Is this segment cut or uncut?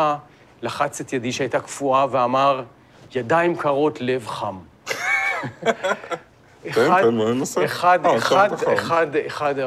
uncut